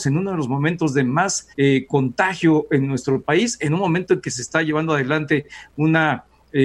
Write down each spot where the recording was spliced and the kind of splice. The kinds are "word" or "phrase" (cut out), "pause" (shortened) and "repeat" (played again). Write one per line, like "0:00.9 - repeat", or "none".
0:01.5 - pause